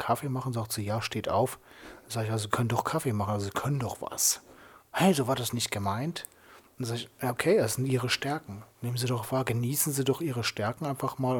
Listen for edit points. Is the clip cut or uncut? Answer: uncut